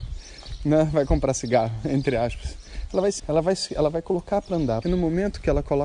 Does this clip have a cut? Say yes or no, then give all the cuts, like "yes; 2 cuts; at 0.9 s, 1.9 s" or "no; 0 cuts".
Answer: yes; 2 cuts; at 3.2 s, 4.8 s